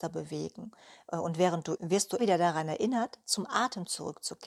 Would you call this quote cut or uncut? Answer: cut